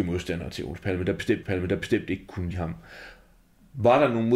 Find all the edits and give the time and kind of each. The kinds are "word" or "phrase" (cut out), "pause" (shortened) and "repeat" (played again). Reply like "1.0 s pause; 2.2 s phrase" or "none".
1.4 s repeat; 2.5 s word